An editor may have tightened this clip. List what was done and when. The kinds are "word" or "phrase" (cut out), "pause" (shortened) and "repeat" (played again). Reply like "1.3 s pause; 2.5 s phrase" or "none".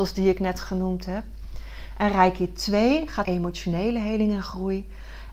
3.2 s word

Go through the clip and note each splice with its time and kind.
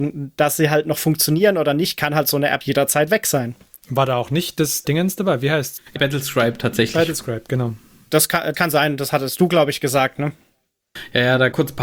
2.6 s word; 4.8 s word; 6.0 s word; 8.5 s word; 10.1 s word

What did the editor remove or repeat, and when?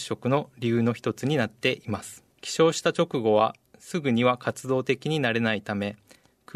2.3 s pause

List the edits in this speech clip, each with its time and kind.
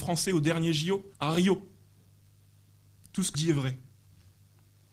1.1 s pause; 3.3 s word

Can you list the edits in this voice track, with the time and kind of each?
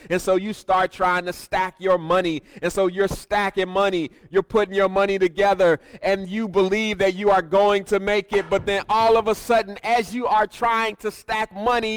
none

